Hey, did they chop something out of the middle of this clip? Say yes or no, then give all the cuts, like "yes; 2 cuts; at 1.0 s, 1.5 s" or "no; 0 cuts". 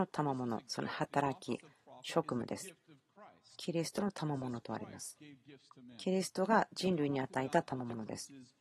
no; 0 cuts